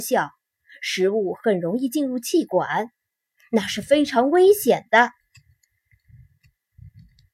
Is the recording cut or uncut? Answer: uncut